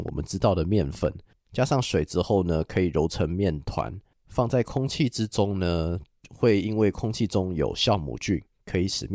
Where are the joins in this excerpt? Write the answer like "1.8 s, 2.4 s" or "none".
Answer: none